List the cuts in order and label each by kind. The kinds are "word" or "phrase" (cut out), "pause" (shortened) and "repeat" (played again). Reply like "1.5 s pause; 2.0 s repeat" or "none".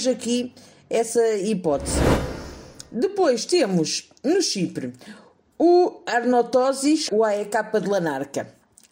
7.1 s word